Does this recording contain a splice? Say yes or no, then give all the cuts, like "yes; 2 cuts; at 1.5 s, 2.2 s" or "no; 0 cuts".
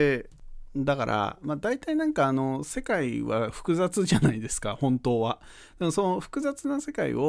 no; 0 cuts